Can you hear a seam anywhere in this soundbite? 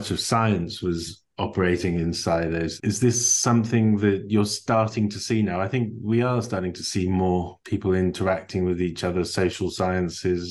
yes; 1 cut; at 7.6 s

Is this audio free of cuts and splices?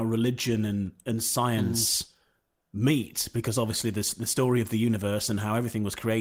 yes; 0 cuts

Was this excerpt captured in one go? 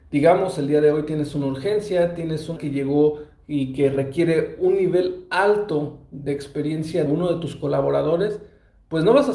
no; 2 cuts; at 2.6 s, 7.1 s

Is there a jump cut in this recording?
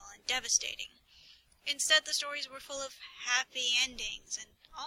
no; 0 cuts

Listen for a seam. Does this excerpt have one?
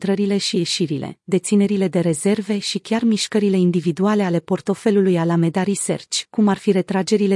no; 0 cuts

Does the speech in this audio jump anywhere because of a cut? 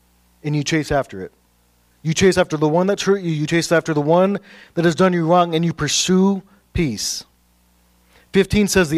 no; 0 cuts

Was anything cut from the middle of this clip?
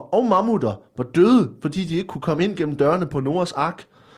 no; 0 cuts

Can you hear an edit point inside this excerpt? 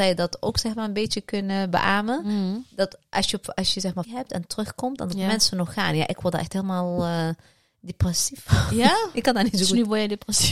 yes; 1 cut; at 4.0 s

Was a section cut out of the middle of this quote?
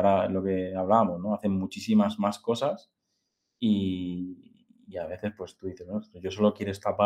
no; 0 cuts

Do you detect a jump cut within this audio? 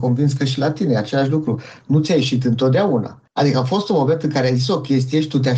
yes; 1 cut; at 3.3 s

